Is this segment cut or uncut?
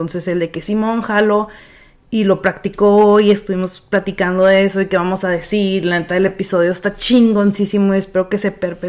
uncut